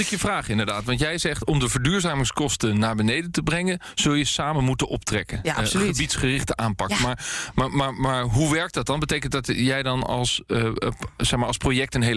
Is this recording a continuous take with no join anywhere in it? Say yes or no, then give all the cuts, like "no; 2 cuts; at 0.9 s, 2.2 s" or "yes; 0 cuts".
yes; 0 cuts